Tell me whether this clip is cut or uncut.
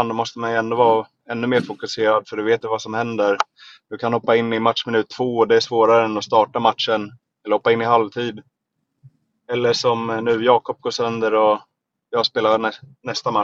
cut